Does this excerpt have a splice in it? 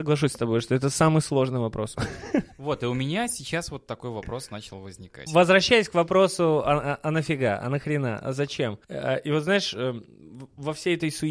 yes; 2 cuts; at 2.5 s, 8.8 s

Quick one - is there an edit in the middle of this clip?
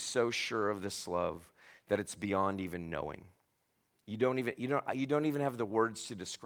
no; 0 cuts

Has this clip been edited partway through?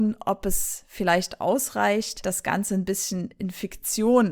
no; 0 cuts

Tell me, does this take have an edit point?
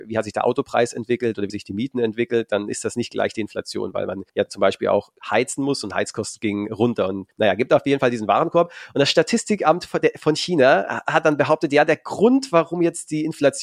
yes; 4 cuts; at 1.5 s, 4.3 s, 5.2 s, 7.3 s

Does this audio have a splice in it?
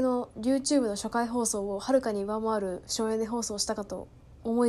no; 0 cuts

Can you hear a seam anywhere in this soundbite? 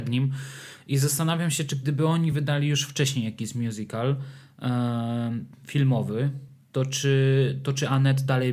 no; 0 cuts

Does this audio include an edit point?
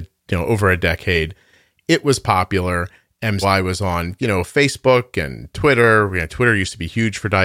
yes; 1 cut; at 3.4 s

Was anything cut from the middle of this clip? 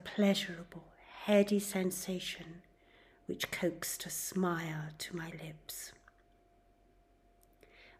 no; 0 cuts

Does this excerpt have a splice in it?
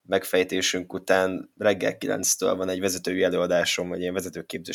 yes; 1 cut; at 1.5 s

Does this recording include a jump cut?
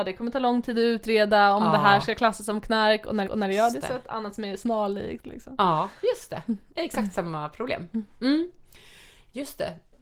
yes; 1 cut; at 3.2 s

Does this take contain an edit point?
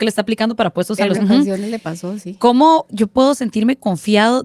yes; 1 cut; at 1.1 s

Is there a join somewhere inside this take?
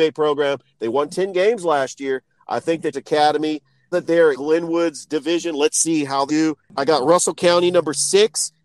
yes; 4 cuts; at 2.9 s, 3.9 s, 4.3 s, 6.3 s

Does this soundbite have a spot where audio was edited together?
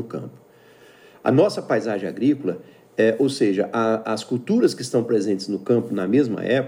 no; 0 cuts

